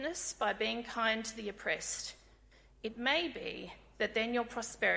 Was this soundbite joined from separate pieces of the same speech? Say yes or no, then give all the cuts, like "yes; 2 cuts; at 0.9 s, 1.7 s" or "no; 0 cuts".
no; 0 cuts